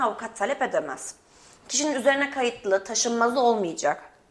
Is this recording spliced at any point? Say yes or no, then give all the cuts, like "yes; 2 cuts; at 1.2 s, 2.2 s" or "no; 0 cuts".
no; 0 cuts